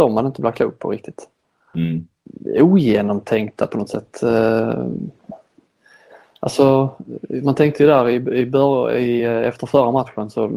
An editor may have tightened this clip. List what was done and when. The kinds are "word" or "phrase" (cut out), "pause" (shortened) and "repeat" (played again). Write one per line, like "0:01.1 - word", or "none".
none